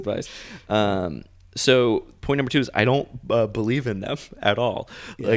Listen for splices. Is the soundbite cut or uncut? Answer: uncut